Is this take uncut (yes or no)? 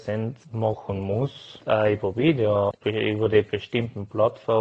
yes